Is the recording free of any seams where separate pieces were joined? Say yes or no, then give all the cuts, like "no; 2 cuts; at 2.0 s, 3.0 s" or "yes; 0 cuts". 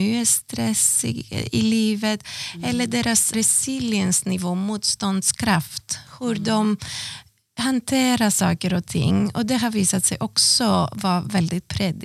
no; 1 cut; at 3.3 s